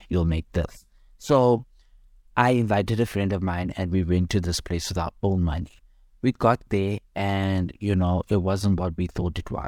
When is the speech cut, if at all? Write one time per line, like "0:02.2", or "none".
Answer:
none